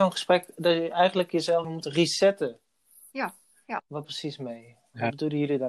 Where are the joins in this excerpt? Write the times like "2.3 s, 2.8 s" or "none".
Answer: 1.6 s, 4.0 s